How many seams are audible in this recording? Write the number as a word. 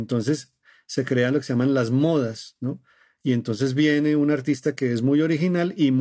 zero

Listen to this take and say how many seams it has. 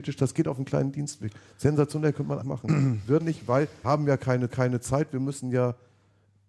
four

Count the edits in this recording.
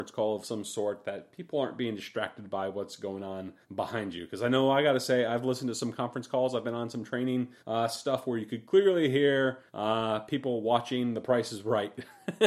three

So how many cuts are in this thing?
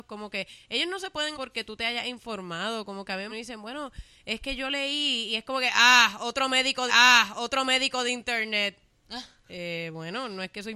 four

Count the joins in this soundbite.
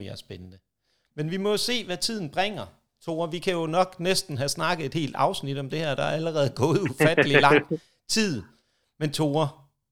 zero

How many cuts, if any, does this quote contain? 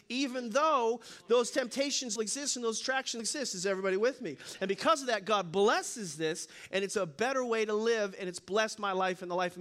two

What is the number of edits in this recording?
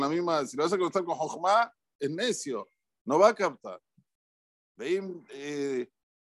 zero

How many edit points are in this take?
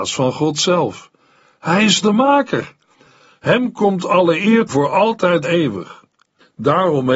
three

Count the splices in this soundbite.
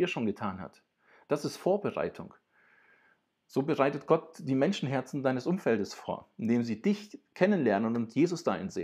zero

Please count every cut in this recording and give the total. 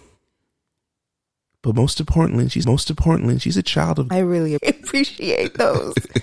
three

